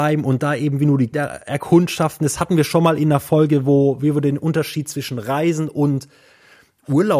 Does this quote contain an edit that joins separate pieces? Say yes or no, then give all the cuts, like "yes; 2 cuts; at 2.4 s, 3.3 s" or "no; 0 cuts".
yes; 1 cut; at 1.1 s